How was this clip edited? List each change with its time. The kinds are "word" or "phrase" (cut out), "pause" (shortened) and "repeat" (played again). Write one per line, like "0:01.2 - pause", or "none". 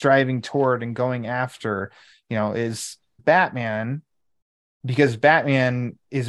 0:03.2 - word